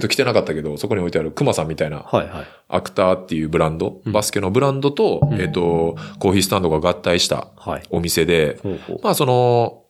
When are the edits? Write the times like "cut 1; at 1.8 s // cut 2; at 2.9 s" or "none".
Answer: none